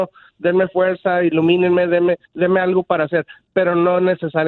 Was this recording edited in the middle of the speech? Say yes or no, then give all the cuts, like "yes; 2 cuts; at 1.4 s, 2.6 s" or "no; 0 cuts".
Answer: yes; 2 cuts; at 2.2 s, 3.4 s